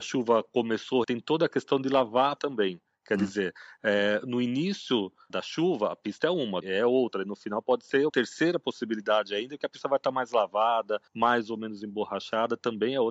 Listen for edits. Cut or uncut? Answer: cut